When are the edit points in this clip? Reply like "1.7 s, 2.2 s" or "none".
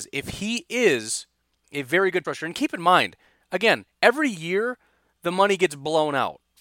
2.2 s